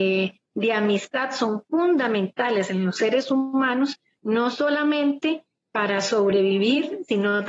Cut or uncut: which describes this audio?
uncut